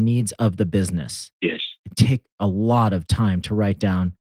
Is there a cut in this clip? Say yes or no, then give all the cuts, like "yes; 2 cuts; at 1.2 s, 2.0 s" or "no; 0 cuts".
no; 0 cuts